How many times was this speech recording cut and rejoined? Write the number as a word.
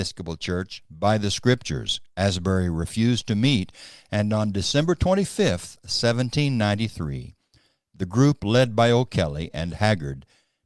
one